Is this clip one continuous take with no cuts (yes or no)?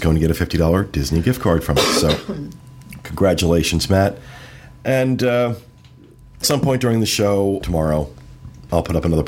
no